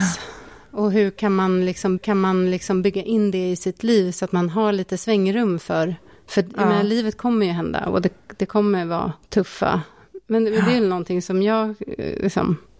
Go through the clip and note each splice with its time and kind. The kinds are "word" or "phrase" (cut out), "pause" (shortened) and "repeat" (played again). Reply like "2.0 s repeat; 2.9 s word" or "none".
2.0 s repeat